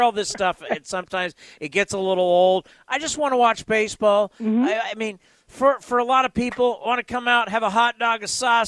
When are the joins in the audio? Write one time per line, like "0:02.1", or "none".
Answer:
none